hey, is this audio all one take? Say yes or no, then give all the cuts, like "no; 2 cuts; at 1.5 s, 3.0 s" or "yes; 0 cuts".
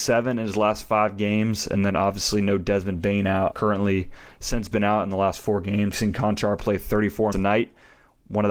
no; 4 cuts; at 3.5 s, 4.7 s, 5.9 s, 7.3 s